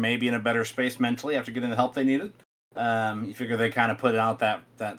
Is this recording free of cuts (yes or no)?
yes